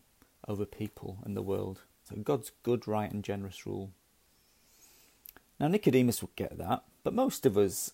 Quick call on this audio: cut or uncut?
uncut